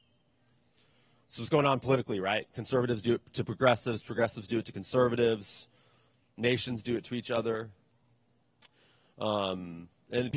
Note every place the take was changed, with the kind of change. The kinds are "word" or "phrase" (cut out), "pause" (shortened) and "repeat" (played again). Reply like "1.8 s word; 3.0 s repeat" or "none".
none